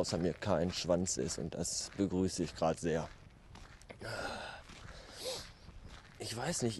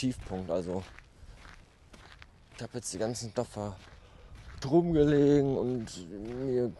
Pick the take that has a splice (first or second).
second